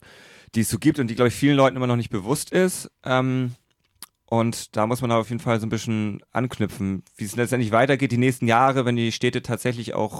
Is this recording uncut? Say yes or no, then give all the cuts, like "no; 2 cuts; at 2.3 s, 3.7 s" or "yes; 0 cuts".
yes; 0 cuts